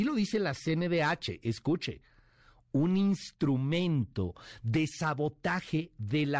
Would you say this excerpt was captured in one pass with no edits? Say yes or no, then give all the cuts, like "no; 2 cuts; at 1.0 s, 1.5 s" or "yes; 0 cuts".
yes; 0 cuts